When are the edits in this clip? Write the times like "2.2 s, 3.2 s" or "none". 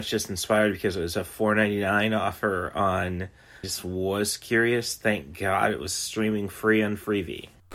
3.6 s